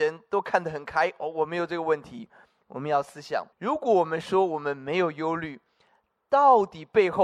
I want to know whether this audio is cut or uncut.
cut